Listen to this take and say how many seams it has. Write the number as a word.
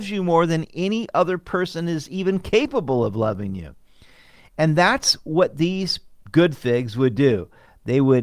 zero